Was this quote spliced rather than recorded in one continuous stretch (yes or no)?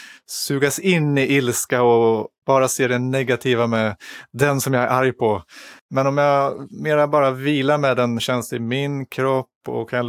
yes